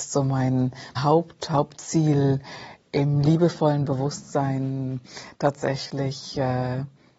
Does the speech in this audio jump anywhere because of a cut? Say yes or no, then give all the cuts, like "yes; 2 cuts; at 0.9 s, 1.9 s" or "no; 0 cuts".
yes; 1 cut; at 1.0 s